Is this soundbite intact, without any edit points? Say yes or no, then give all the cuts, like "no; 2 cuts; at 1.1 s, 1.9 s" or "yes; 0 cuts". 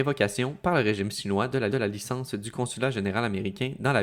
no; 1 cut; at 1.7 s